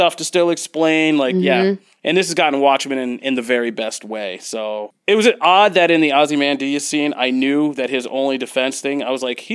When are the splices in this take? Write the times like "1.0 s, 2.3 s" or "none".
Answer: none